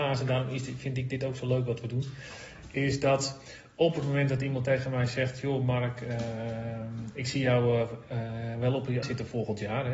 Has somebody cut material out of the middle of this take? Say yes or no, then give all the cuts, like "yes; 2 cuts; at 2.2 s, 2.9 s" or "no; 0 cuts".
yes; 1 cut; at 9.0 s